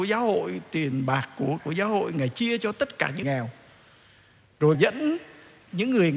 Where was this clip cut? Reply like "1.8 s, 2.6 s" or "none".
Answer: 1.6 s, 3.2 s, 4.7 s